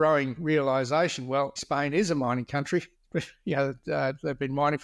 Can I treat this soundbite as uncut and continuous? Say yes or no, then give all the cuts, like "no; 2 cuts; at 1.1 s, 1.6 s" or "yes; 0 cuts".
no; 2 cuts; at 1.6 s, 2.9 s